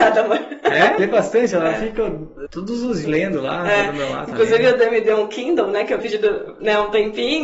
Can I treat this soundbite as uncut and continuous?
no; 4 cuts; at 1.0 s, 2.5 s, 3.0 s, 6.0 s

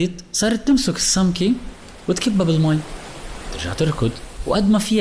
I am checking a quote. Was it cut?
no; 0 cuts

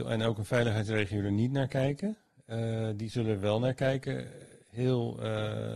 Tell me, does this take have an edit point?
no; 0 cuts

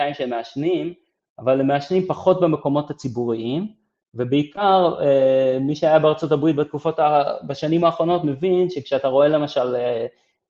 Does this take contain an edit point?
no; 0 cuts

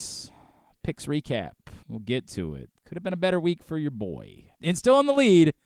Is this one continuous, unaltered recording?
no; 3 cuts; at 1.8 s, 2.8 s, 4.5 s

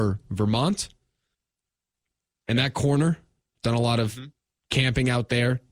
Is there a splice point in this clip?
no; 0 cuts

